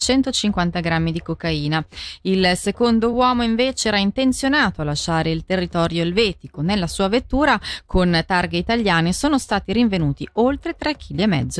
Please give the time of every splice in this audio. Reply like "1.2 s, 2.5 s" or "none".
none